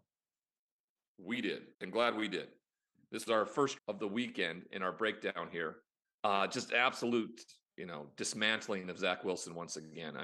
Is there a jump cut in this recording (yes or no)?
yes